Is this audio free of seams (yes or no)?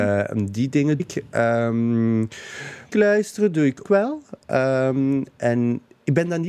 no